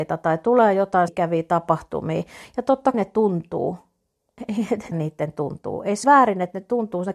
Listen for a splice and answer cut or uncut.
cut